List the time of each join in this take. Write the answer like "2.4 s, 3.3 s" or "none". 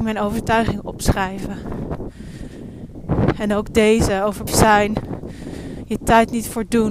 4.5 s